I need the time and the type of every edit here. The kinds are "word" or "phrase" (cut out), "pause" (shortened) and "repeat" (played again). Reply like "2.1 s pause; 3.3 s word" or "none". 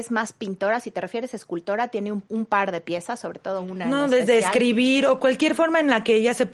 2.3 s pause